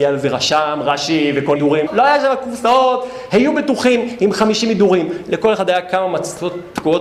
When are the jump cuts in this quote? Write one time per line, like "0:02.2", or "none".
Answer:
0:01.6
0:01.9

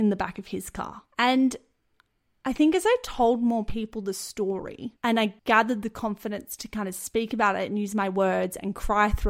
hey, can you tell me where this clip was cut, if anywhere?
0:01.1
0:05.0
0:05.4

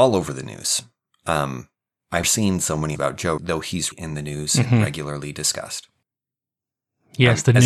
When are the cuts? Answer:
0:02.2
0:02.9
0:03.4
0:03.9

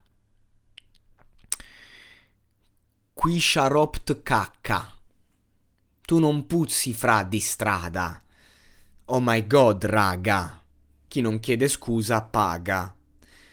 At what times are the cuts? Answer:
none

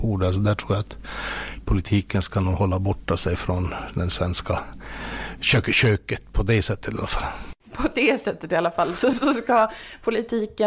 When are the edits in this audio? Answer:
none

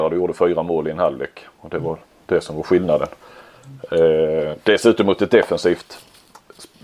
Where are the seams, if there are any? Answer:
none

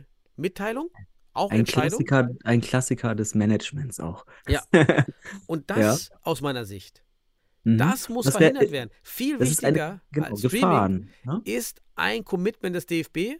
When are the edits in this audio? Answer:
none

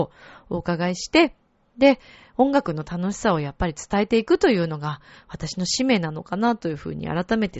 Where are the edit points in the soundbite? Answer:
none

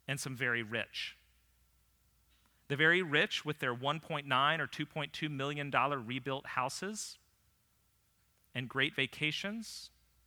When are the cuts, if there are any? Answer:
none

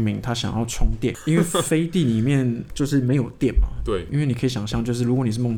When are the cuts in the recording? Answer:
0:02.7

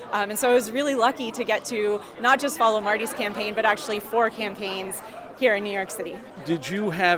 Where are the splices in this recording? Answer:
none

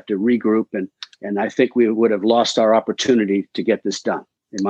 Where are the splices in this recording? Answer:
0:01.1

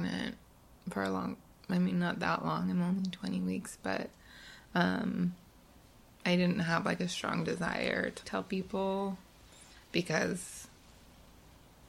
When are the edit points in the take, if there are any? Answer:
0:08.2

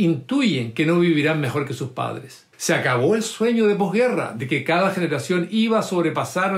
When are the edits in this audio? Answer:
0:02.5

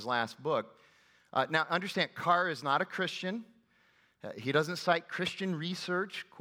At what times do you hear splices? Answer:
none

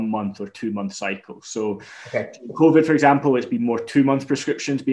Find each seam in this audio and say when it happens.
none

